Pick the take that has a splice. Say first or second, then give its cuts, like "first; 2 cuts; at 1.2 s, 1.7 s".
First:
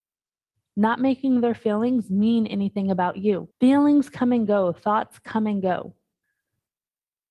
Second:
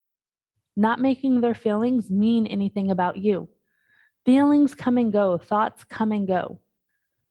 first; 1 cut; at 3.5 s